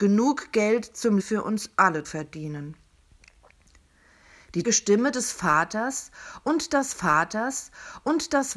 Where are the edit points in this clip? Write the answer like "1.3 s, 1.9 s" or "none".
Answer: 1.2 s, 2.0 s, 4.6 s, 6.9 s